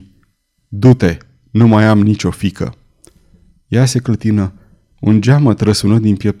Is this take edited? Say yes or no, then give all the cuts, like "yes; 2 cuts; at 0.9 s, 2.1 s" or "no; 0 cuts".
no; 0 cuts